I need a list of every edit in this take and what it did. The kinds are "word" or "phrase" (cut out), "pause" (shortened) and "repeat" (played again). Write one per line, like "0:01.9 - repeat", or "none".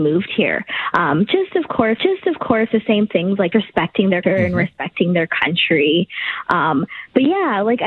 0:02.0 - repeat
0:03.5 - word
0:04.2 - word